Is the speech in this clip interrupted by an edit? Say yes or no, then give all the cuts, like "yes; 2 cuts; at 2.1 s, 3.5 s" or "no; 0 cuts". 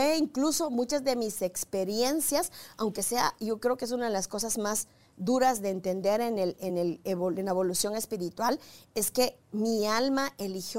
no; 0 cuts